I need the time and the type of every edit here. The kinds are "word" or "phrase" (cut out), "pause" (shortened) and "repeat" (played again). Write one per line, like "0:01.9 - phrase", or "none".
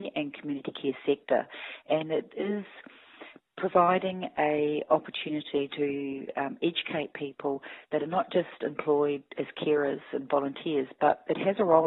none